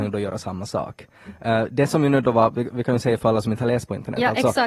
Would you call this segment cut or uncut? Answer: uncut